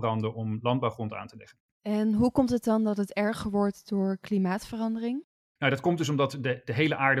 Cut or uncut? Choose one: uncut